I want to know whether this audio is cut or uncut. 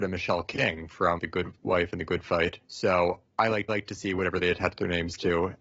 cut